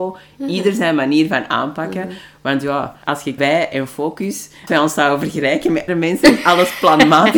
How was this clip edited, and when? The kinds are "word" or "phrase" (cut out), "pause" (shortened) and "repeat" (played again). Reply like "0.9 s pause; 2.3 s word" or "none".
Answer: 3.0 s pause; 3.4 s phrase; 4.7 s word; 5.9 s word